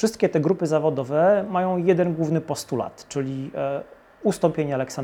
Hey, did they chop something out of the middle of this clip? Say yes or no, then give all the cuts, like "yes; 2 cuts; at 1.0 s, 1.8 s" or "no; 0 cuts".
no; 0 cuts